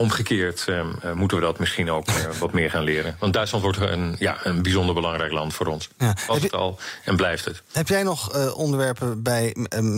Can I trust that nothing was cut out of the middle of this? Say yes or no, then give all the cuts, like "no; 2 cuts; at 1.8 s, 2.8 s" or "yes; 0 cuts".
yes; 0 cuts